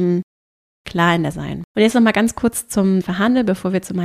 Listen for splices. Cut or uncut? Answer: cut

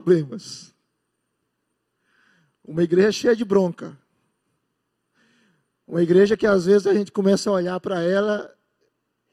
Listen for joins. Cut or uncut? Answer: uncut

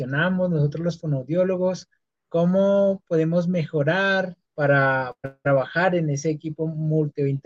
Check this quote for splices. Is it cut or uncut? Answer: cut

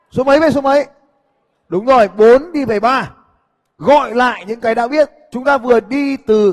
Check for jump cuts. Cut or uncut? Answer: uncut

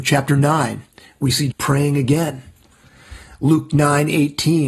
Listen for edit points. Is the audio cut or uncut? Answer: cut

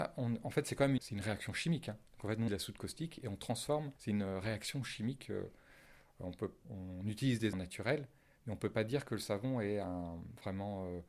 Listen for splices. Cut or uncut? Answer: cut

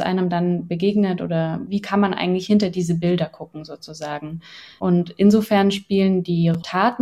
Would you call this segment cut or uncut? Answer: uncut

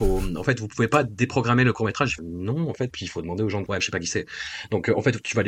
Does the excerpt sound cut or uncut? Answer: cut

